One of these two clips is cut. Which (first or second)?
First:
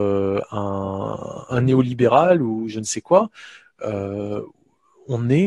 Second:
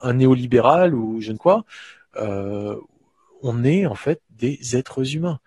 second